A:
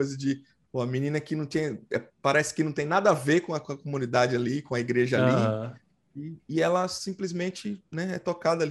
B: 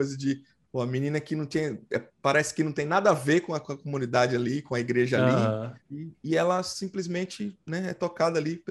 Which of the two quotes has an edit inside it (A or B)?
B